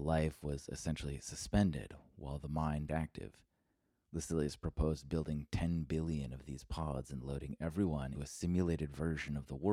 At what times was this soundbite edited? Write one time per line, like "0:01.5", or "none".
0:02.9
0:08.1